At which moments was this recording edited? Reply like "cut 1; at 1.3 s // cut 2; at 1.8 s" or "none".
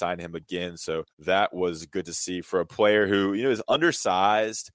cut 1; at 1.1 s // cut 2; at 2.4 s